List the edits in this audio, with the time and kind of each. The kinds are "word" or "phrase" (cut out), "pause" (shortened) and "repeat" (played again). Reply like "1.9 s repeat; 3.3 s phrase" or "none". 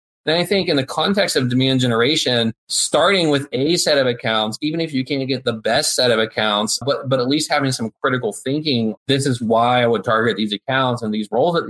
2.6 s pause; 6.8 s word; 9.0 s word